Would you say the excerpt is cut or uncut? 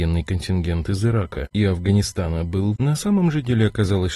cut